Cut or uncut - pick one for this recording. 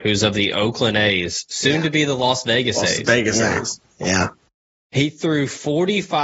uncut